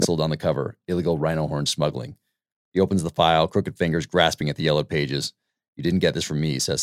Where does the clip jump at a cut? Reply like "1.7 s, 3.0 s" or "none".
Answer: none